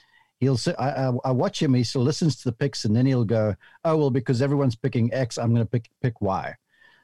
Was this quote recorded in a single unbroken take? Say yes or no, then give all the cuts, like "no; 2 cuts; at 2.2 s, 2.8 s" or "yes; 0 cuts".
yes; 0 cuts